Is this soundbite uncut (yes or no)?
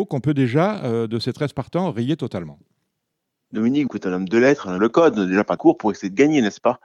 no